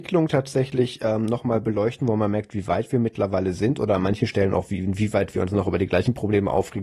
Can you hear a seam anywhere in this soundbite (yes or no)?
no